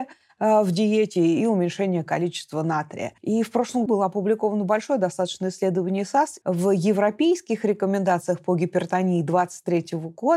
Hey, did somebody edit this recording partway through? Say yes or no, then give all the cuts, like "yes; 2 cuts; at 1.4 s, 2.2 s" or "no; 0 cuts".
yes; 3 cuts; at 3.2 s, 3.9 s, 6.4 s